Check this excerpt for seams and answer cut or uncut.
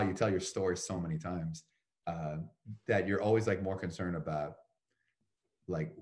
uncut